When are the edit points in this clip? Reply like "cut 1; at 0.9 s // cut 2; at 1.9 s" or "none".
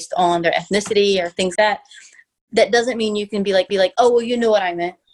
cut 1; at 1.5 s // cut 2; at 3.7 s